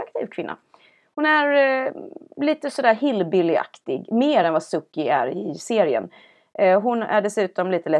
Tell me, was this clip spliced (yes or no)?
no